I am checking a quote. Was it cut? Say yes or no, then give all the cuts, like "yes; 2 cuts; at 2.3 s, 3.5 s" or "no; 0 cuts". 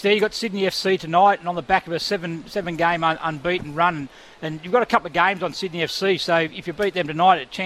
no; 0 cuts